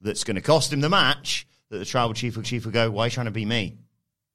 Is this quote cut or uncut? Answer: cut